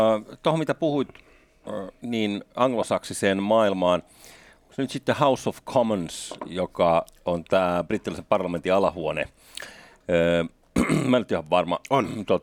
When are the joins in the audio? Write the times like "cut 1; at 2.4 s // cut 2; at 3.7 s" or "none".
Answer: none